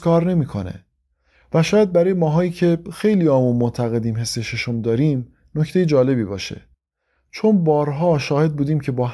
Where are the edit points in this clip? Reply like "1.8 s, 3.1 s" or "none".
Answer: none